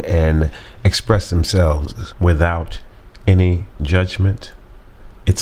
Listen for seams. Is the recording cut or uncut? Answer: uncut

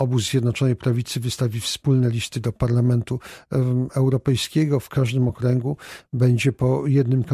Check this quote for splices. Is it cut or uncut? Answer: uncut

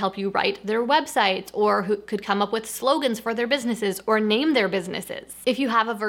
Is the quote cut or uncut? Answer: uncut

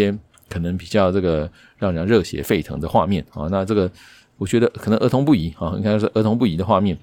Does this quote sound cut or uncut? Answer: uncut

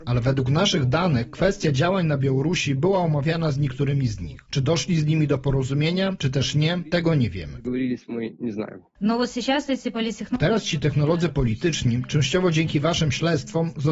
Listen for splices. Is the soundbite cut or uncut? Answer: uncut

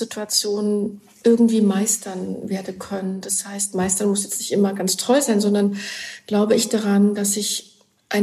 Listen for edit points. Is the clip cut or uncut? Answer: uncut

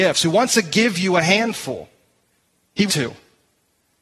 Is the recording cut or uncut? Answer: cut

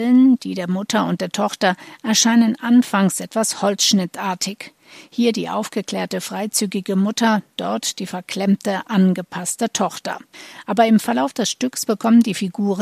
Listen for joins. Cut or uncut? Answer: uncut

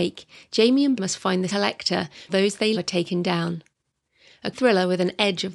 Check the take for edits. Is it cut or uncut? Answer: cut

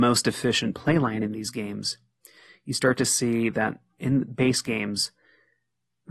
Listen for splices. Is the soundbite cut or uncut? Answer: uncut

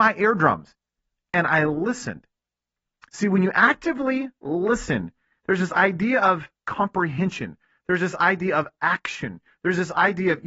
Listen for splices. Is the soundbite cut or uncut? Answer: uncut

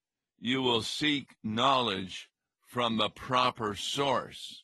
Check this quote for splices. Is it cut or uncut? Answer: uncut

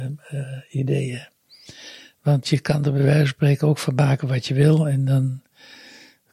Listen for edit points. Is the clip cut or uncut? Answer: uncut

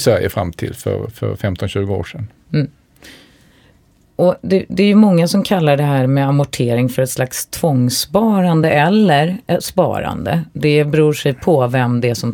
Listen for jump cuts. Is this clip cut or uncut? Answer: uncut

